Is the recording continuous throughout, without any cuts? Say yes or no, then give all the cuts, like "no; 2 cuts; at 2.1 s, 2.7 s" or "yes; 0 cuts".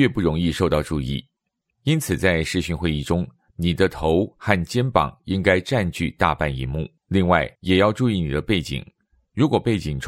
no; 2 cuts; at 7.0 s, 7.6 s